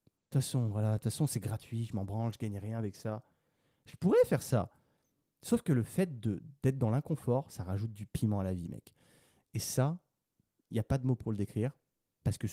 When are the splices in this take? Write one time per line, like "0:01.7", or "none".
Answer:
none